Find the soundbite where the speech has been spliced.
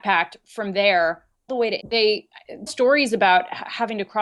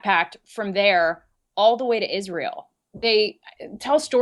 first; 3 cuts; at 1.5 s, 1.8 s, 2.7 s

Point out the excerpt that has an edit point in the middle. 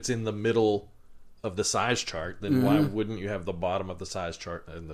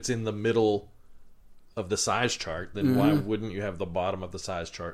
first; 1 cut; at 1.4 s

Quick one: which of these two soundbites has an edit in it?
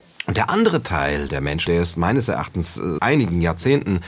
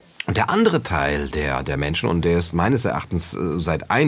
first; 3 cuts; at 1.3 s, 1.7 s, 3.0 s

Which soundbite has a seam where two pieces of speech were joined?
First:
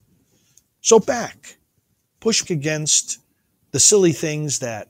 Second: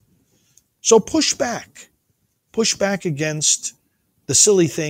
first; 2 cuts; at 1.0 s, 2.4 s

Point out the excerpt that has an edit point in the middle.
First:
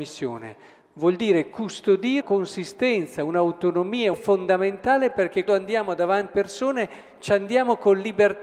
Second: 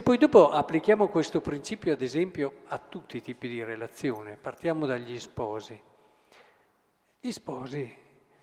first; 4 cuts; at 2.2 s, 4.1 s, 5.5 s, 6.3 s

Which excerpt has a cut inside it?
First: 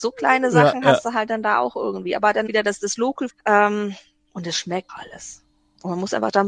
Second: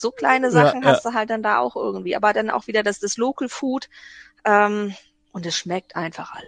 first; 3 cuts; at 2.5 s, 3.3 s, 4.9 s

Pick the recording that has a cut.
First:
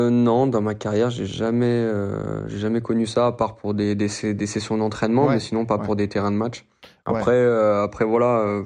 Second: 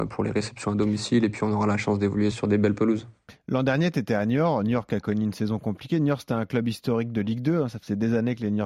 second; 1 cut; at 2.3 s

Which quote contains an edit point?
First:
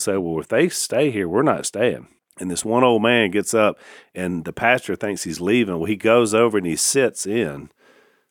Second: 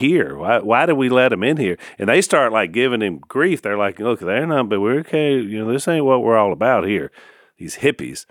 first; 1 cut; at 2.2 s

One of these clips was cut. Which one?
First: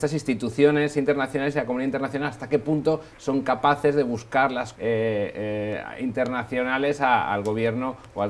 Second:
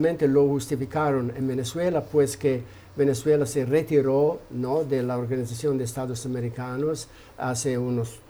first; 1 cut; at 4.7 s

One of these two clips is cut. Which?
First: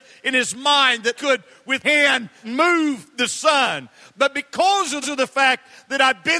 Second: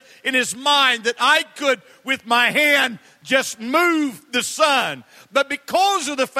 first; 4 cuts; at 1.1 s, 1.8 s, 2.4 s, 5.0 s

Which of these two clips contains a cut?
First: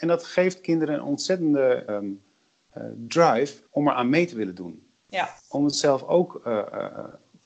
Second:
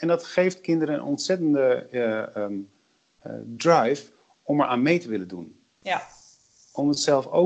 first; 3 cuts; at 1.9 s, 3.7 s, 5.4 s

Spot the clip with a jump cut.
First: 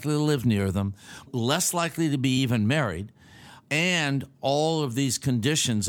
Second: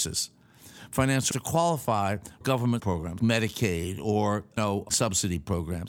second; 6 cuts; at 1.3 s, 2.4 s, 2.8 s, 3.2 s, 4.6 s, 4.9 s

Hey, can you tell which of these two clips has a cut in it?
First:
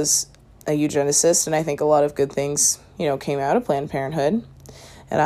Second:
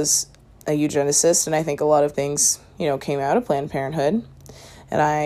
second; 1 cut; at 2.1 s

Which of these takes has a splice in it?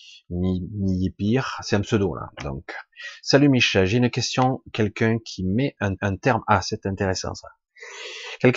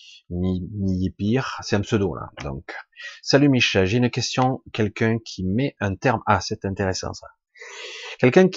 first; 1 cut; at 6.0 s

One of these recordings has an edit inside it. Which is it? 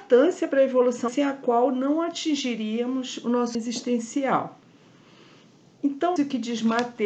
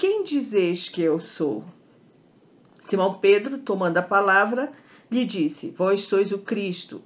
first; 3 cuts; at 1.1 s, 3.5 s, 6.2 s

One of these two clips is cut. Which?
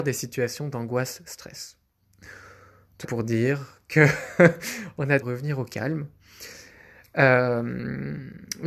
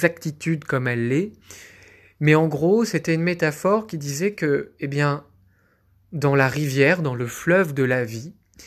first; 2 cuts; at 3.0 s, 5.2 s

